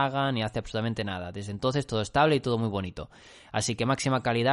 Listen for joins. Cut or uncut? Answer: uncut